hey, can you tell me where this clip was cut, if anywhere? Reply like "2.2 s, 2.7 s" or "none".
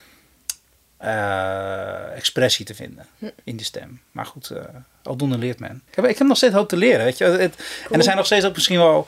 5.9 s